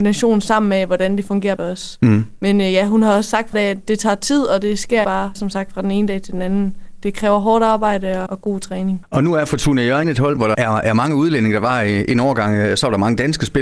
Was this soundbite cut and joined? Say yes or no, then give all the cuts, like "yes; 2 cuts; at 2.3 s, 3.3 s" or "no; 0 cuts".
yes; 8 cuts; at 1.6 s, 3.5 s, 3.8 s, 5.0 s, 5.3 s, 8.3 s, 10.0 s, 10.5 s